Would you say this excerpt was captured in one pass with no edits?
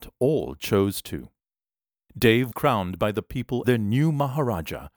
no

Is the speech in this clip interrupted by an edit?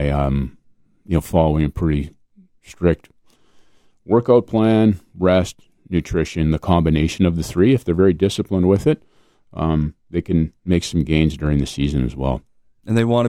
no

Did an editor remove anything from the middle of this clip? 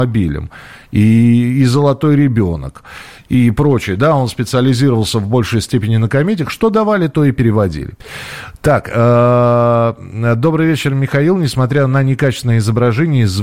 no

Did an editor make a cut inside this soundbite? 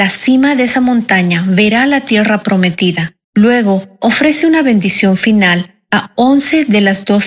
yes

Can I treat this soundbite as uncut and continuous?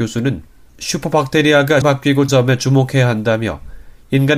no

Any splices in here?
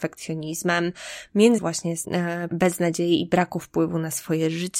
yes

